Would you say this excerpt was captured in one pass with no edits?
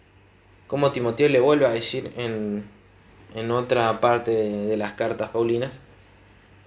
yes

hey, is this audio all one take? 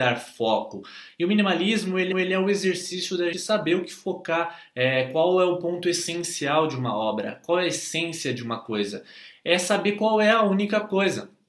no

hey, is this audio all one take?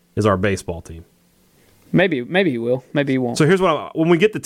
yes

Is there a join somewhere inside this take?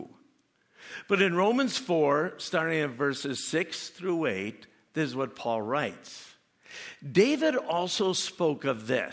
no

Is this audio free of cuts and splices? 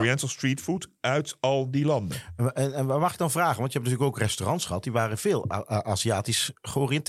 yes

